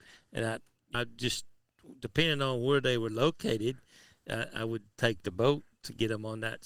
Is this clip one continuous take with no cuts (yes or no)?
no